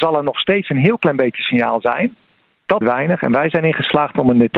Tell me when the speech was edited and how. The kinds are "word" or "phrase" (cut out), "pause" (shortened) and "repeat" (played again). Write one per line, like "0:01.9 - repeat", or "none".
0:02.8 - phrase